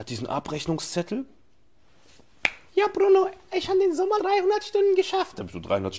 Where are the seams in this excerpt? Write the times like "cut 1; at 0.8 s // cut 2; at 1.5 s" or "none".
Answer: cut 1; at 2.7 s // cut 2; at 4.2 s